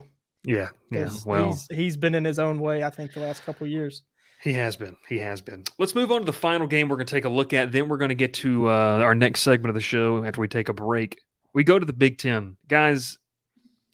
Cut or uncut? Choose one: uncut